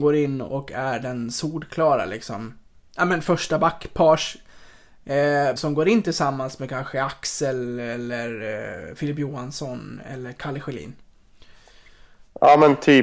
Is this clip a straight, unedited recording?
no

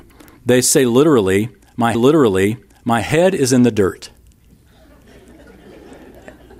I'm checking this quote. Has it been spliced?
yes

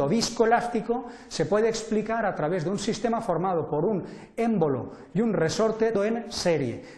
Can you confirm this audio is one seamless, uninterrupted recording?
no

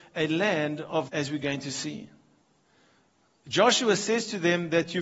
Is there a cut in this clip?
yes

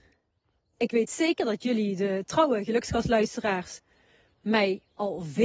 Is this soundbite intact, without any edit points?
yes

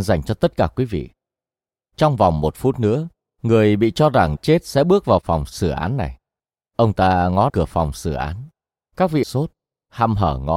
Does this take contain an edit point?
yes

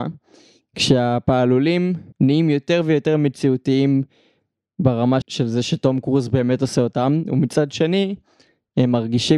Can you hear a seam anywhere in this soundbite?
yes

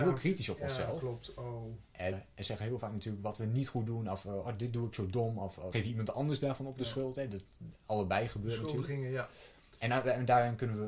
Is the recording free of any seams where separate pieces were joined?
no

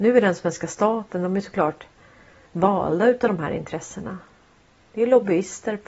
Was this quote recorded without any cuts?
yes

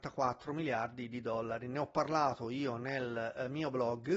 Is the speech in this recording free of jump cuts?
yes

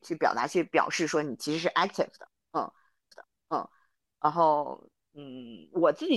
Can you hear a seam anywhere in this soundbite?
yes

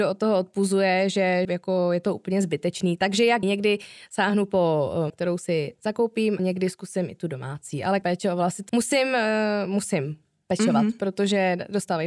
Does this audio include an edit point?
yes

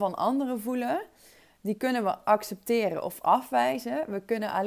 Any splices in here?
no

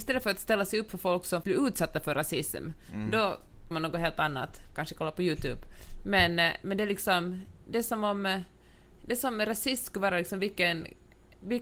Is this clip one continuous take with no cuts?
no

